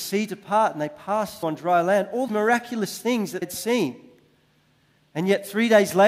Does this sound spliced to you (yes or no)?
yes